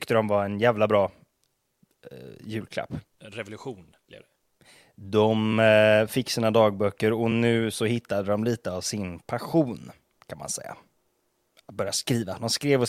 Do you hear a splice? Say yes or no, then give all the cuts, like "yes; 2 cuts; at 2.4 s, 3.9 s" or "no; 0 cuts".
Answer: no; 0 cuts